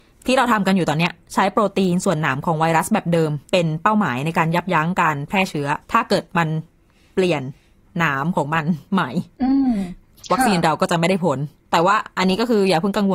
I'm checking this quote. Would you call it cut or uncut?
cut